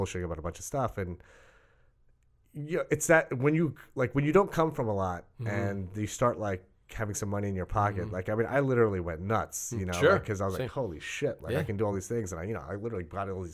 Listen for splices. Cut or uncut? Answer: uncut